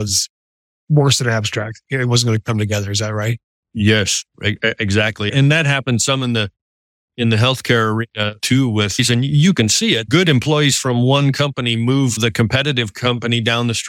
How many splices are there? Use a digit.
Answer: 0